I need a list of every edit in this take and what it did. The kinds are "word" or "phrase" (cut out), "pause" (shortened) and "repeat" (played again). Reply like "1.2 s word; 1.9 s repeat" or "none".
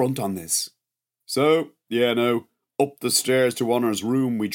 none